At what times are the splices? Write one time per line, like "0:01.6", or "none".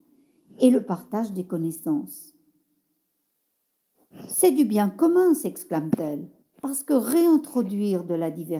0:06.4